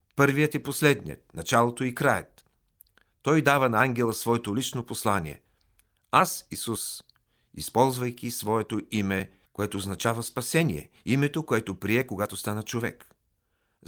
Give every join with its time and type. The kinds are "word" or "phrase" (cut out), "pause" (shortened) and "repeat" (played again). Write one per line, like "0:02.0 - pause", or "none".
0:09.5 - pause